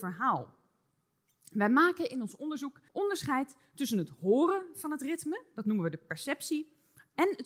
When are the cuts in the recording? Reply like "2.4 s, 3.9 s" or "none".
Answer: 2.9 s